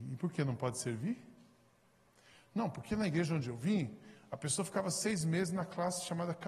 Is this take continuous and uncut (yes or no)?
yes